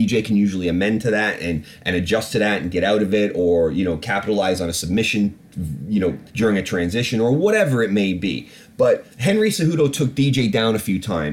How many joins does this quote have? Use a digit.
2